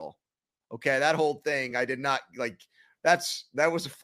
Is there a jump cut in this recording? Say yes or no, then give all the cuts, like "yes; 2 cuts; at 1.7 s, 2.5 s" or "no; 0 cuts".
no; 0 cuts